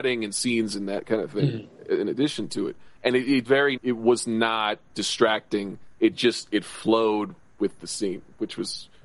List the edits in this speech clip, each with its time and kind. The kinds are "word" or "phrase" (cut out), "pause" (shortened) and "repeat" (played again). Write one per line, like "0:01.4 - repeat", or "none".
0:03.0 - pause
0:03.5 - word
0:03.8 - phrase
0:06.0 - pause
0:07.4 - word